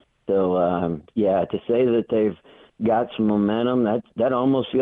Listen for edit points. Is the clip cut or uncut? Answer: uncut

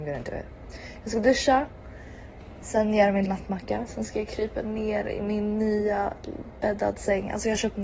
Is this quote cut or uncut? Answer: cut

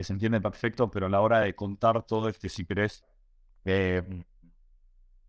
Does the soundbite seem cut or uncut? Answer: uncut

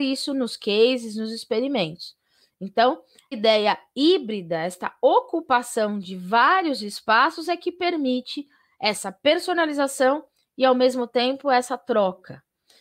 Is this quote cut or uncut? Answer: cut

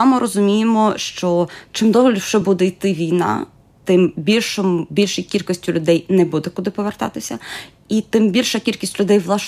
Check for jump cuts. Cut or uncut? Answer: uncut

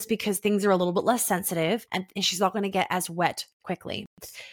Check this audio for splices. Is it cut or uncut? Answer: cut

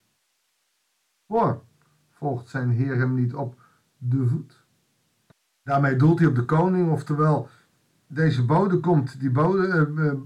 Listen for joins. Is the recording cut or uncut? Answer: uncut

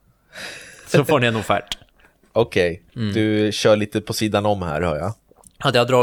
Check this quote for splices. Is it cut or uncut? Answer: cut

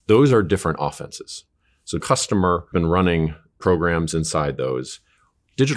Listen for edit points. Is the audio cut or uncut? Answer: cut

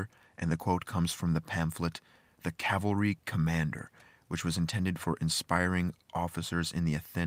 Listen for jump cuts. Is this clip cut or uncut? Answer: uncut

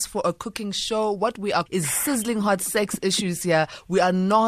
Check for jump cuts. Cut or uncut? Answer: cut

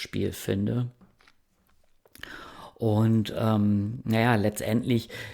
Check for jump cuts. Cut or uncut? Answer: uncut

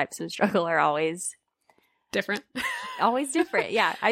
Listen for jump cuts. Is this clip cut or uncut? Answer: uncut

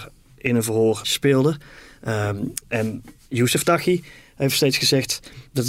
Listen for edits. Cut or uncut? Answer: cut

